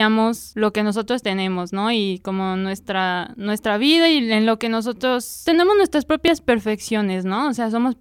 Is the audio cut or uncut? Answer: uncut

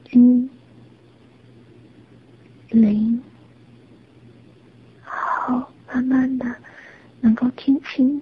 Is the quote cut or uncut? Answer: uncut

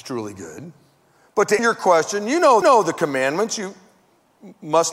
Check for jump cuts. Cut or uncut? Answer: cut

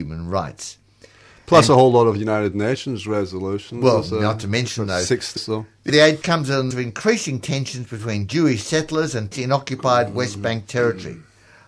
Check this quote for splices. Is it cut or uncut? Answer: cut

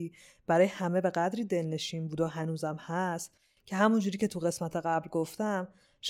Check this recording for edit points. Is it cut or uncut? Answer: uncut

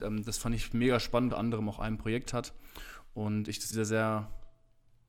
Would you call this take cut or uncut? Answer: cut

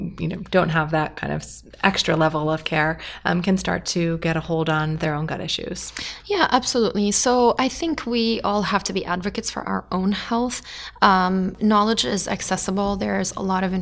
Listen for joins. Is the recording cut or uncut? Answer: uncut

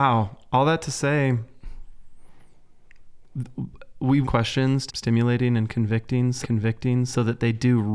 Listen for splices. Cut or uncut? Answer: cut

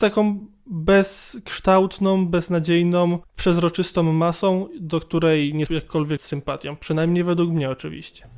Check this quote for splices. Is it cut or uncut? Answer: cut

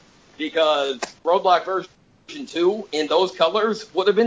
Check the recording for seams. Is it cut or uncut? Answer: cut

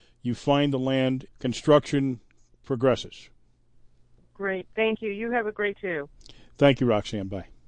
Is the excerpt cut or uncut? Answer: cut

